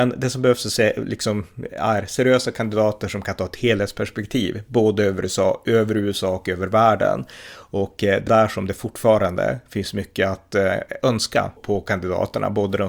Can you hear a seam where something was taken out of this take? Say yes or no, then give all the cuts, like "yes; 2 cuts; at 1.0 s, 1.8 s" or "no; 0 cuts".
yes; 2 cuts; at 8.3 s, 11.6 s